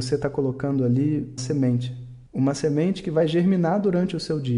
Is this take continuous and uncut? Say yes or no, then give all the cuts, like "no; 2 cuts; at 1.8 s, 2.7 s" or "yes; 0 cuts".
no; 2 cuts; at 1.4 s, 2.3 s